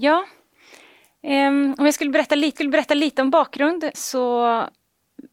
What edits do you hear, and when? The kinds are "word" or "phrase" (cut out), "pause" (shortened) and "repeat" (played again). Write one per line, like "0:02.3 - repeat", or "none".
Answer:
0:02.6 - repeat
0:03.9 - word